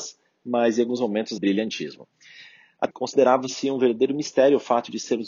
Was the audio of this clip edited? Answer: yes; 2 cuts; at 1.4 s, 2.9 s

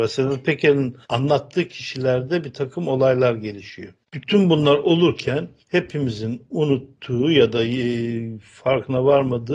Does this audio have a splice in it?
yes; 3 cuts; at 1.0 s, 4.0 s, 5.6 s

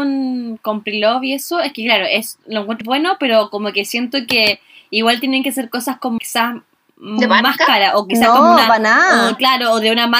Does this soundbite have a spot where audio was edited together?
yes; 2 cuts; at 2.8 s, 6.2 s

